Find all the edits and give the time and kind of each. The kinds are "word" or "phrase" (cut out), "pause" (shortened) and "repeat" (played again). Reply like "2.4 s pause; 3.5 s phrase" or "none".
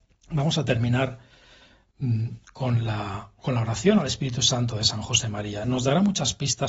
2.4 s pause